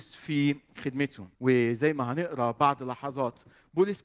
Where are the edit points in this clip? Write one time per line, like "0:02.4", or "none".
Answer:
0:01.3